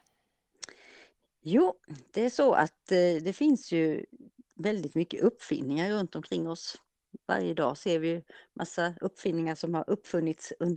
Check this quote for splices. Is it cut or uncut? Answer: uncut